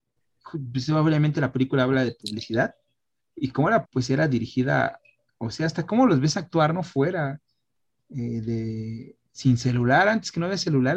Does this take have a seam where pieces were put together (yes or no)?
yes